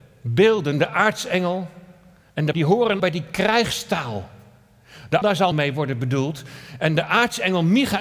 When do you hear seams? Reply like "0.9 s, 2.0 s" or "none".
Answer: 2.5 s, 3.0 s, 5.2 s, 5.5 s